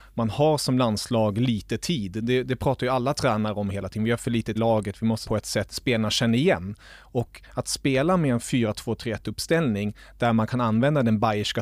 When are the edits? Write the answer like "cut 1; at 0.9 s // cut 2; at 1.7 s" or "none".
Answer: cut 1; at 4.5 s // cut 2; at 5.2 s // cut 3; at 5.7 s